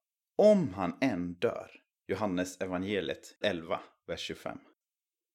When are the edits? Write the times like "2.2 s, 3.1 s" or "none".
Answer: 1.9 s, 3.4 s